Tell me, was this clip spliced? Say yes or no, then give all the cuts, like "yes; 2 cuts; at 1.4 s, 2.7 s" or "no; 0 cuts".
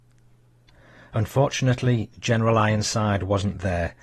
no; 0 cuts